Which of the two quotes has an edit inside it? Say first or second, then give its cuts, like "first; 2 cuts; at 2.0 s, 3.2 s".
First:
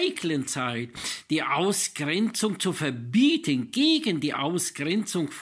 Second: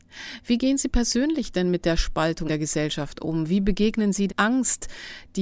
second; 2 cuts; at 2.5 s, 4.3 s